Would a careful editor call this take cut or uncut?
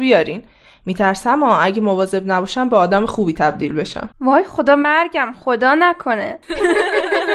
cut